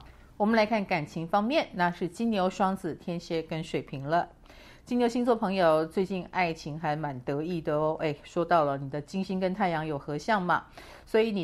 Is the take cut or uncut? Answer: uncut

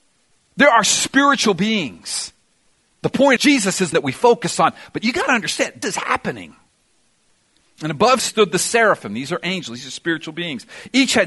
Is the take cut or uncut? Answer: cut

